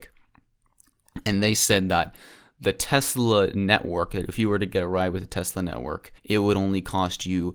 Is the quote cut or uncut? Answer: cut